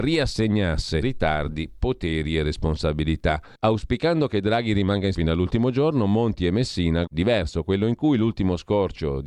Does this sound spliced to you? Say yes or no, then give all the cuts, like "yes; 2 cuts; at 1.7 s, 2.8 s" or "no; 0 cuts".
yes; 4 cuts; at 1.0 s, 3.6 s, 5.1 s, 7.1 s